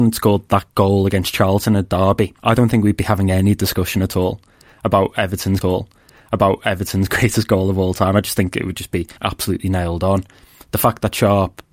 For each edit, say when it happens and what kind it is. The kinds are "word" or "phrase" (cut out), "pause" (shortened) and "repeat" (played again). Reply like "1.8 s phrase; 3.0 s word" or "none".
2.4 s pause; 5.6 s repeat; 9.2 s pause